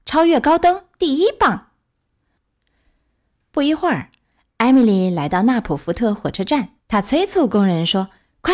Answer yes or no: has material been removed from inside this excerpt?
yes